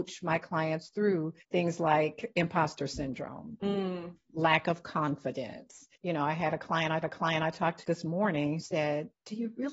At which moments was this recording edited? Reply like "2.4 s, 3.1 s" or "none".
1.4 s, 6.0 s, 7.0 s, 7.8 s, 8.6 s